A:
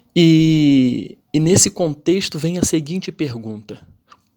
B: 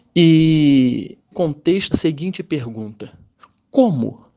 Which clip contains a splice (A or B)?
B